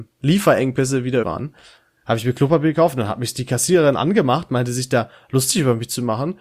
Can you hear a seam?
yes; 1 cut; at 1.2 s

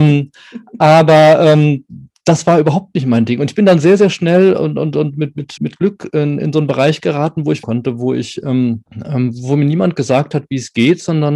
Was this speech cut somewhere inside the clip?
yes; 3 cuts; at 5.6 s, 7.6 s, 8.9 s

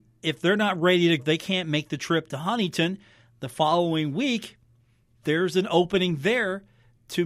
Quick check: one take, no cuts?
no; 2 cuts; at 1.2 s, 5.2 s

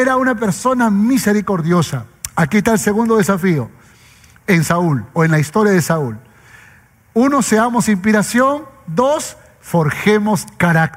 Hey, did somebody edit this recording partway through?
no; 0 cuts

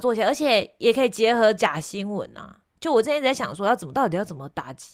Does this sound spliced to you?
no; 0 cuts

